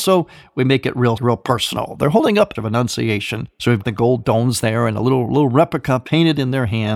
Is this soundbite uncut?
no; 3 cuts; at 1.2 s, 2.6 s, 3.8 s

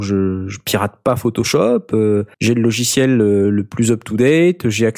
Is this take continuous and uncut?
no; 1 cut; at 2.3 s

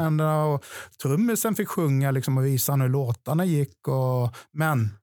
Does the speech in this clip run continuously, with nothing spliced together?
yes; 0 cuts

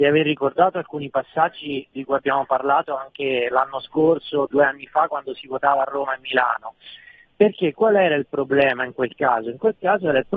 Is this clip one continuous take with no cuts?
yes; 0 cuts

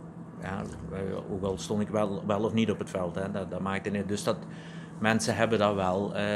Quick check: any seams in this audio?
no; 0 cuts

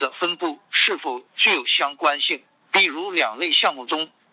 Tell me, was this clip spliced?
no; 0 cuts

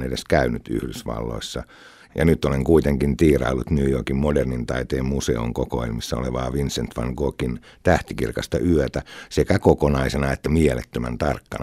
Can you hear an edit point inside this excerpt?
no; 0 cuts

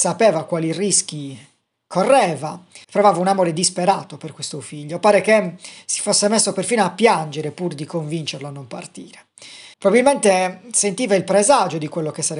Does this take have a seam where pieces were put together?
yes; 2 cuts; at 2.8 s, 9.7 s

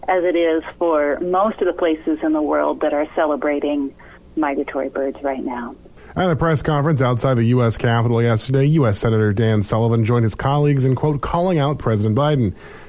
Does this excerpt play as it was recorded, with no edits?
yes; 0 cuts

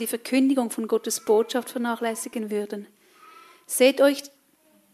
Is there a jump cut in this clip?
no; 0 cuts

